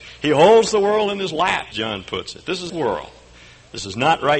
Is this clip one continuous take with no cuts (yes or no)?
no